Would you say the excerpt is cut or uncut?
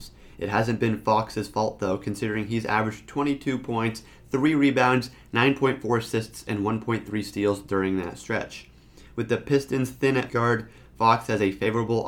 cut